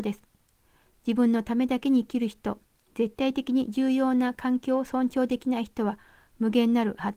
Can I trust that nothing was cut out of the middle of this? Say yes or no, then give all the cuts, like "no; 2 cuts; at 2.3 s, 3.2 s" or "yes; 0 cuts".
yes; 0 cuts